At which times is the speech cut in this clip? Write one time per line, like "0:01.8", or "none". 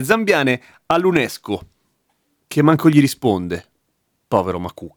none

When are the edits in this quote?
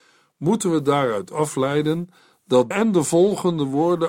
0:02.7

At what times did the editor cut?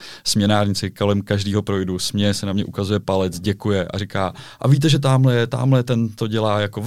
none

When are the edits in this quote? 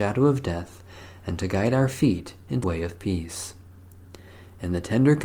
0:02.6

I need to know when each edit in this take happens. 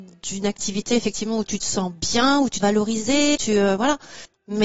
0:02.6
0:03.3

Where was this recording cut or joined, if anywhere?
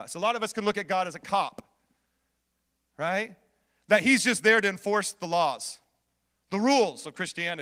none

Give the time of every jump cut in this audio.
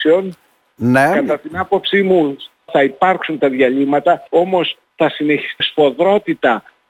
0:02.7
0:04.3
0:05.6

